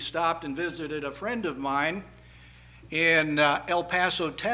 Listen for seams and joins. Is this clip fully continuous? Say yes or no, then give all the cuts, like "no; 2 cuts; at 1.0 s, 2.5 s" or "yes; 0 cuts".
yes; 0 cuts